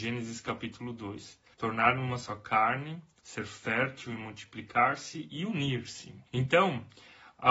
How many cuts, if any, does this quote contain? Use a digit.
2